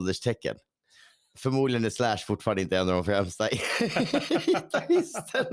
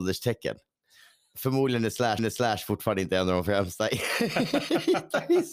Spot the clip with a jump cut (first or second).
second